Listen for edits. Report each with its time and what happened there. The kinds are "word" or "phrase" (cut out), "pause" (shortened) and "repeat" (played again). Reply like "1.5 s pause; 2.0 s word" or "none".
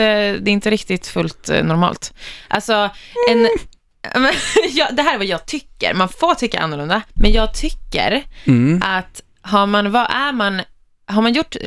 7.1 s pause